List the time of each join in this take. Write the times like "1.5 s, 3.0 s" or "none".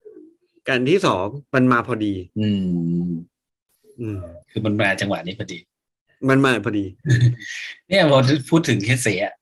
1.5 s, 2.3 s, 4.4 s